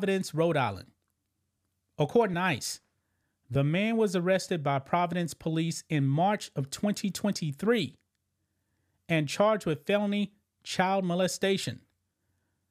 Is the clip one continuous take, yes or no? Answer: yes